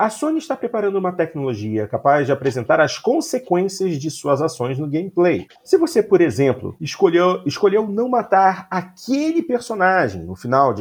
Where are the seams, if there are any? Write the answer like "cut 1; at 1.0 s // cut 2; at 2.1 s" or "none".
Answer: cut 1; at 5.6 s